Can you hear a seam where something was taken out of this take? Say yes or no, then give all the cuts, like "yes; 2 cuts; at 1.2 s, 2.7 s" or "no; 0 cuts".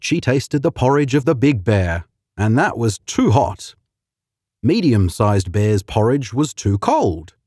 no; 0 cuts